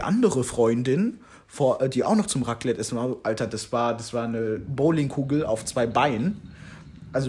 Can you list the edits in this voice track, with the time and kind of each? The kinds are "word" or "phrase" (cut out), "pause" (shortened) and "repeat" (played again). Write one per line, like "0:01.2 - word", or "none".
none